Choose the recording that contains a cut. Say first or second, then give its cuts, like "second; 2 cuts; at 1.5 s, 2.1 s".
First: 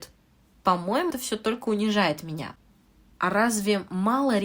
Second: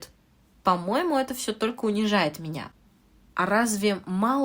first; 1 cut; at 1.1 s